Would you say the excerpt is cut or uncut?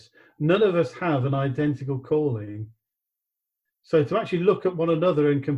uncut